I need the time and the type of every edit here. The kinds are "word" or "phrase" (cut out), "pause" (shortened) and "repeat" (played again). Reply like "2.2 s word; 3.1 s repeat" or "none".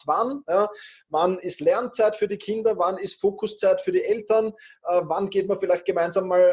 none